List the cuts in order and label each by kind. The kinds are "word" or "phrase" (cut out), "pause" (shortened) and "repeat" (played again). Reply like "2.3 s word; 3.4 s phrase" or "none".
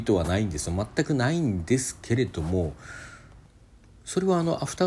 none

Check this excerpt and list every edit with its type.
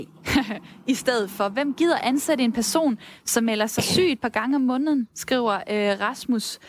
none

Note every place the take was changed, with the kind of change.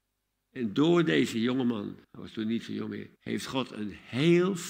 2.0 s pause; 3.2 s pause

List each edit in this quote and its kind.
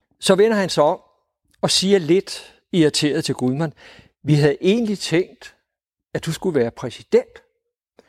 none

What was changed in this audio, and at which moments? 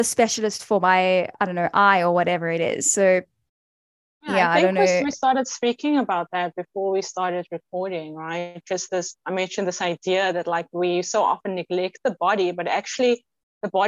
9.2 s pause

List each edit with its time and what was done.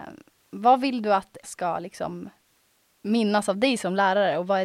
1.4 s word

